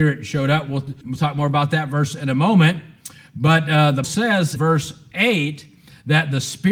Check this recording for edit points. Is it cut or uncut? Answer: cut